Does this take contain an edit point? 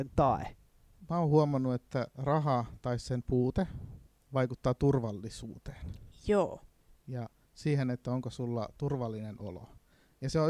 no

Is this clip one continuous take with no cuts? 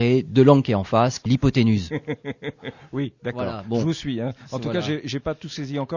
no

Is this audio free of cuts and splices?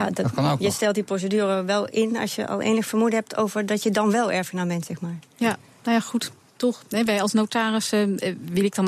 yes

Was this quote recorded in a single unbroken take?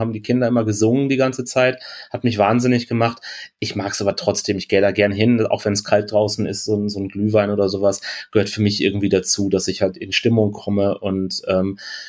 yes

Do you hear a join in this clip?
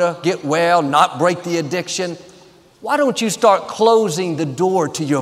no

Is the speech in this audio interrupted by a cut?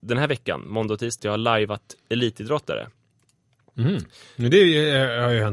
yes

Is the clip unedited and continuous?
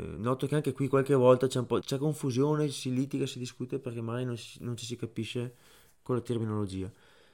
no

